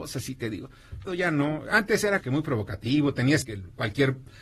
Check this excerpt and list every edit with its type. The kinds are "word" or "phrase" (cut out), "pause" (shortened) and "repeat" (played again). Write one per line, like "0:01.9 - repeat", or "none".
0:01.1 - phrase
0:02.2 - word
0:03.4 - phrase